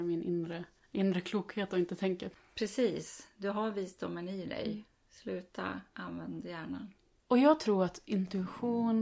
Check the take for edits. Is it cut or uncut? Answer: uncut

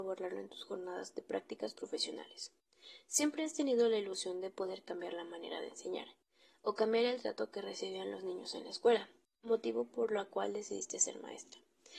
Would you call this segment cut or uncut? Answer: uncut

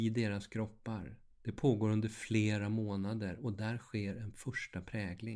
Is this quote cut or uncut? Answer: cut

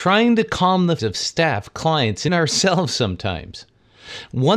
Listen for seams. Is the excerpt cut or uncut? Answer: cut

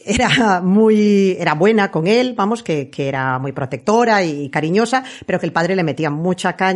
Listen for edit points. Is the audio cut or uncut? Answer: uncut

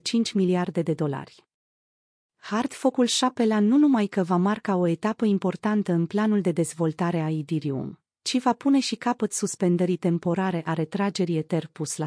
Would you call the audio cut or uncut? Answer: uncut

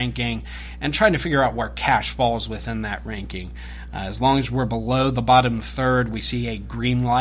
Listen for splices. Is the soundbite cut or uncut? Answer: uncut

